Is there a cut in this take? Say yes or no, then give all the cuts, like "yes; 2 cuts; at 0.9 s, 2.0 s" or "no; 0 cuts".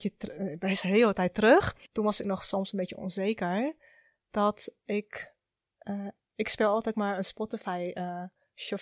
yes; 2 cuts; at 1.9 s, 6.9 s